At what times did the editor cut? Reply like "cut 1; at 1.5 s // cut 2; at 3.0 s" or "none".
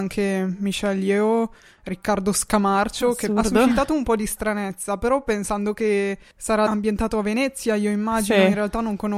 none